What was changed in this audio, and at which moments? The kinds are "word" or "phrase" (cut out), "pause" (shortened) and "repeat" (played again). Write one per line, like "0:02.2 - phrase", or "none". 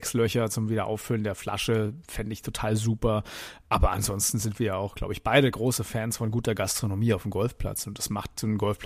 none